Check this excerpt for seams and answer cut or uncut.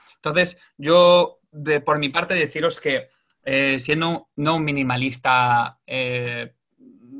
uncut